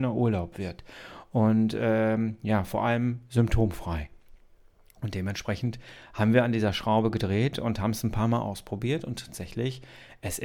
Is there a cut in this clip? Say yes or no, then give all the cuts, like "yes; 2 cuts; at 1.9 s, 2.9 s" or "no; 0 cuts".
no; 0 cuts